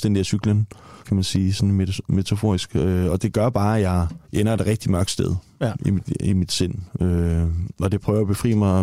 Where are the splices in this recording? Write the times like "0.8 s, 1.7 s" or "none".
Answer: 1.0 s, 4.2 s